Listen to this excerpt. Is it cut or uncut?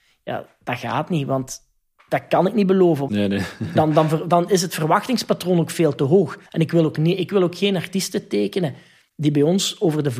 cut